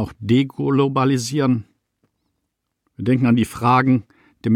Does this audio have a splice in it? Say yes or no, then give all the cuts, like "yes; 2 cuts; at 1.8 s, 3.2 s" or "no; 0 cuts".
no; 0 cuts